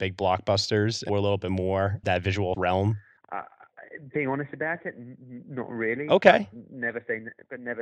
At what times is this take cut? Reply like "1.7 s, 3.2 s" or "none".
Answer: 1.1 s, 2.0 s, 2.5 s